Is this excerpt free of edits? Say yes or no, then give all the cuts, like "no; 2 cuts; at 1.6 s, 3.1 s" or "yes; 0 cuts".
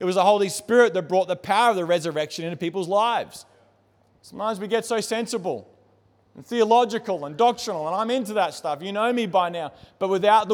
yes; 0 cuts